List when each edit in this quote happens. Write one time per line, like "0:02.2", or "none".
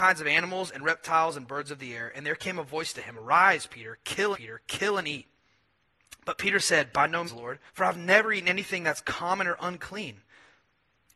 0:04.3
0:07.3
0:07.7